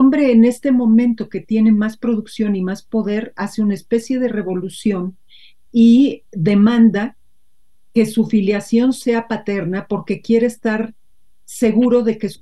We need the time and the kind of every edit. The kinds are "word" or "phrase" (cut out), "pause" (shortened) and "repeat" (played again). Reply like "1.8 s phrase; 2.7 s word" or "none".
none